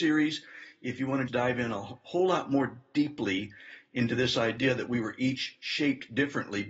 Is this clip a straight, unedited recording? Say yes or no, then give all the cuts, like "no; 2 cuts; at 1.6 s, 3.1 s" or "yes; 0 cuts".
no; 1 cut; at 1.3 s